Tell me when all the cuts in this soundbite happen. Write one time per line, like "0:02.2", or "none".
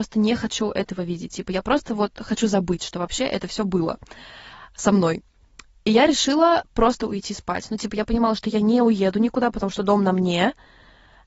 none